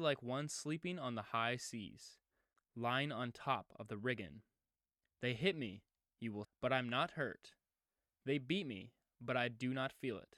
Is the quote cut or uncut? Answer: cut